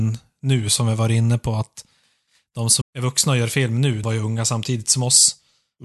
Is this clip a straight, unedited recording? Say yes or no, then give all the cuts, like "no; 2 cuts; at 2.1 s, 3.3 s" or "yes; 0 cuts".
no; 2 cuts; at 2.8 s, 4.0 s